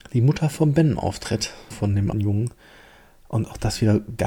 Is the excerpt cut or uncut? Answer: cut